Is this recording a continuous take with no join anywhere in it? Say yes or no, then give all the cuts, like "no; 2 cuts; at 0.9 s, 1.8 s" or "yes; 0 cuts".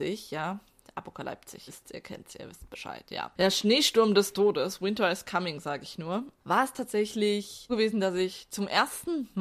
no; 2 cuts; at 1.7 s, 7.7 s